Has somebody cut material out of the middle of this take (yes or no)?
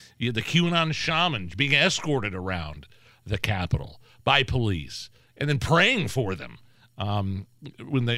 no